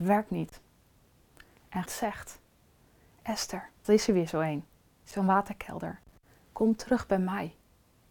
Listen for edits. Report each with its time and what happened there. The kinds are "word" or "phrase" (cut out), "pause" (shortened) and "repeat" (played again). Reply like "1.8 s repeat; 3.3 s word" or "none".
1.9 s word; 3.8 s word